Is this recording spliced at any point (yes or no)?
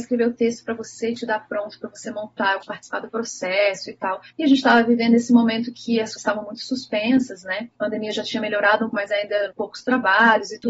yes